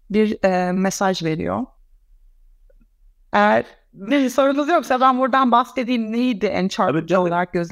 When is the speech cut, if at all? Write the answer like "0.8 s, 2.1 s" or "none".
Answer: none